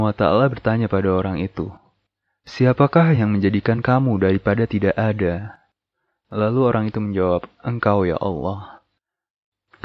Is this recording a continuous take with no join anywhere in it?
yes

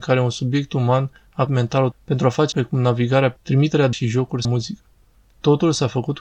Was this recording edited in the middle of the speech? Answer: yes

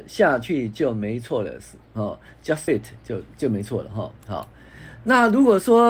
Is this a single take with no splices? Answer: no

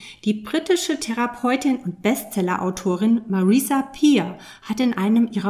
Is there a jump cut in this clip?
no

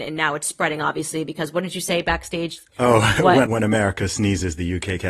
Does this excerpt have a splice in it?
yes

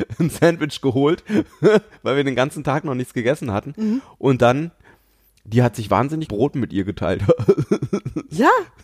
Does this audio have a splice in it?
yes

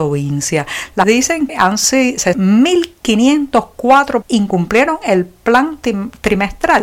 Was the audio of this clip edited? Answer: yes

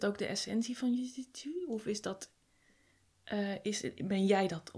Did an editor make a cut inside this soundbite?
no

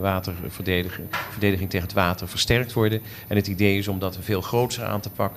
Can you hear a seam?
no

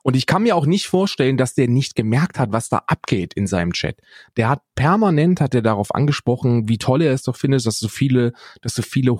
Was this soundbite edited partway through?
no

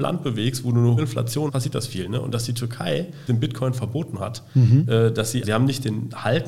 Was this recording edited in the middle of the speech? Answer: yes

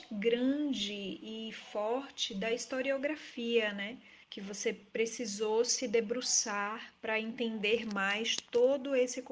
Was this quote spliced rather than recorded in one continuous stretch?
yes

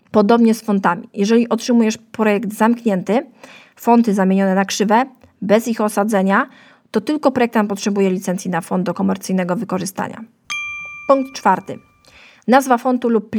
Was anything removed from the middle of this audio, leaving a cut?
no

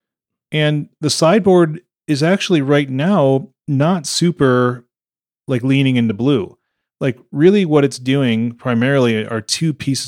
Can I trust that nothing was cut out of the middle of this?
yes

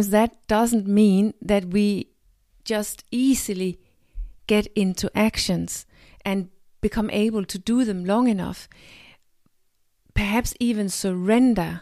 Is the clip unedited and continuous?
yes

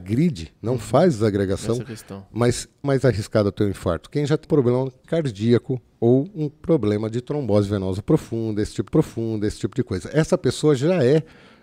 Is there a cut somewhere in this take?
yes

